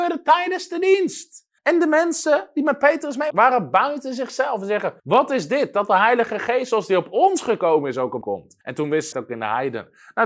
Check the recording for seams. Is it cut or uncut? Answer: cut